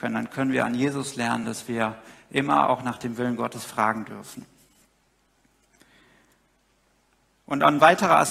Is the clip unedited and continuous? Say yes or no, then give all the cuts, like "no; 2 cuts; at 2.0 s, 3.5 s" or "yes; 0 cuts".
yes; 0 cuts